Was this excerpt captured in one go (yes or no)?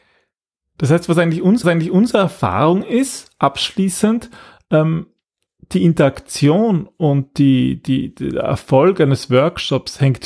no